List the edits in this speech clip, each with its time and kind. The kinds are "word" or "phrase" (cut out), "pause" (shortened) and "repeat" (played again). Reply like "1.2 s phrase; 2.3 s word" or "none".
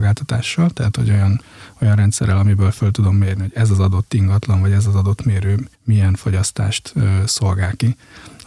5.7 s pause